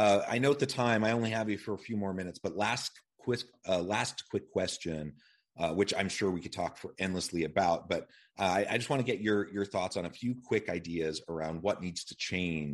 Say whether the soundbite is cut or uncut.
uncut